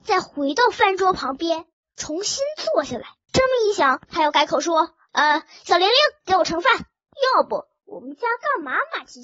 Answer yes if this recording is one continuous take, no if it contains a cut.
no